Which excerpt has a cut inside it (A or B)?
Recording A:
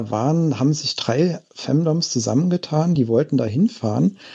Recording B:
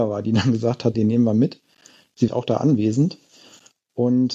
B